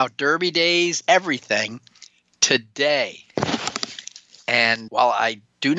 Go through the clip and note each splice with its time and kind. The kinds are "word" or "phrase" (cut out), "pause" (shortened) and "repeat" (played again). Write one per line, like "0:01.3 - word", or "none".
0:01.0 - word
0:04.9 - word

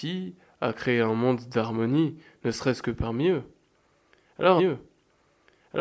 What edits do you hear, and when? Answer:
0:04.6 - repeat

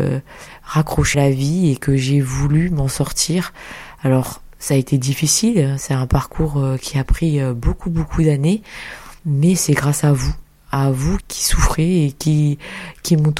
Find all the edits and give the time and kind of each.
0:01.1 - word
0:09.2 - pause
0:11.2 - word

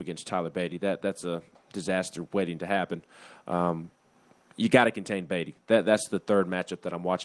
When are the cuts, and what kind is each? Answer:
none

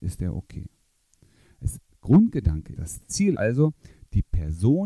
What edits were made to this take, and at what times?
0:02.7 - word
0:03.3 - word

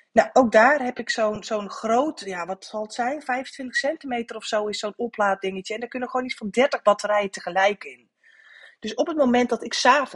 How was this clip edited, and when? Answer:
none

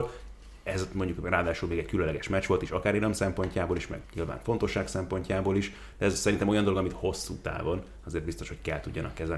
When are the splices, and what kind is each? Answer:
0:04.0 - pause

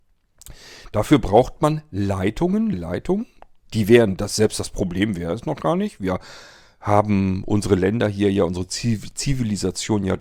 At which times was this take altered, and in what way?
0:02.7 - word

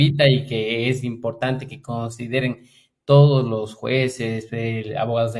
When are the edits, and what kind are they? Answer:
none

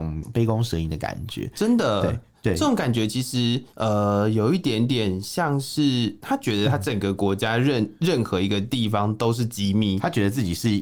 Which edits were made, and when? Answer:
0:03.7 - pause

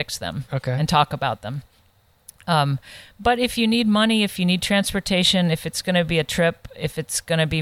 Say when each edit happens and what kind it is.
none

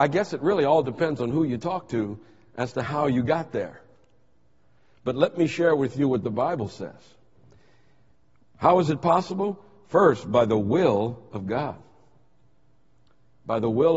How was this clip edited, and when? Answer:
none

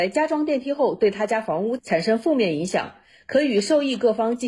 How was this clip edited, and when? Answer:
none

